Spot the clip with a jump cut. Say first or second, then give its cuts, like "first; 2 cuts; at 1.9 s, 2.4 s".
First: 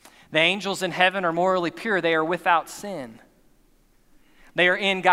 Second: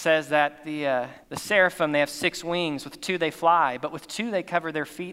second; 1 cut; at 1.2 s